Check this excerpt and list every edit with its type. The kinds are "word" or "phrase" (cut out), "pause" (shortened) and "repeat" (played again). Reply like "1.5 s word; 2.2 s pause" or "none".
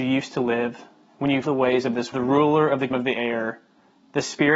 1.4 s word; 2.1 s phrase; 2.9 s word

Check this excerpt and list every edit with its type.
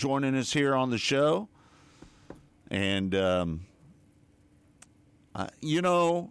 none

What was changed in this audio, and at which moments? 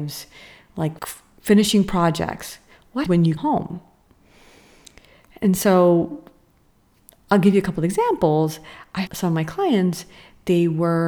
1.0 s word; 3.1 s word; 3.4 s word; 9.1 s word

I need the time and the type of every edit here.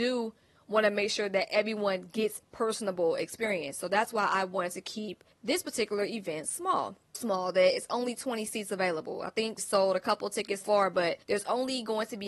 2.4 s phrase; 5.3 s pause; 7.1 s word; 9.6 s word; 10.6 s word; 11.2 s pause

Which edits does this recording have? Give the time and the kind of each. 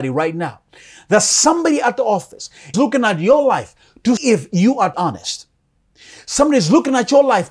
2.7 s word; 4.2 s word; 4.9 s word

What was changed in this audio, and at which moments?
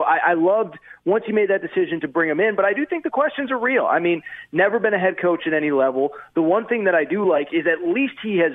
none

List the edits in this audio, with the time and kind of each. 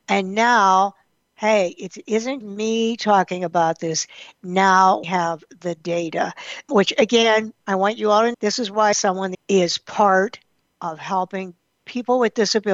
2.4 s word; 5.0 s word; 6.7 s word; 8.3 s word; 8.9 s phrase; 9.3 s phrase

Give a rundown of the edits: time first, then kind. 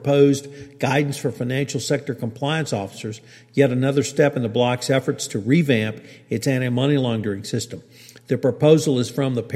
none

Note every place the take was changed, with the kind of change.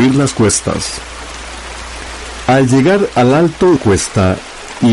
3.8 s word

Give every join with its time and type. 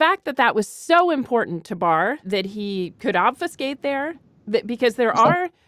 none

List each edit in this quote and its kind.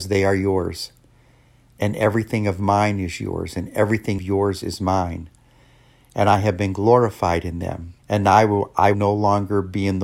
4.2 s word; 8.0 s pause; 8.9 s word

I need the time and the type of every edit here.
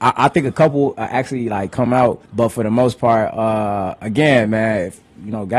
2.3 s pause

